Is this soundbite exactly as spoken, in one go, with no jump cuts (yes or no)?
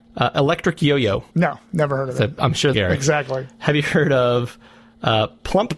no